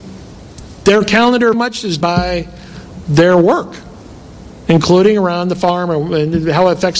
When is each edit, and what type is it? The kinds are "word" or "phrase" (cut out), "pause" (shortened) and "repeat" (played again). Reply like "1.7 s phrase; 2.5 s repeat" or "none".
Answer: 1.5 s word; 2.0 s word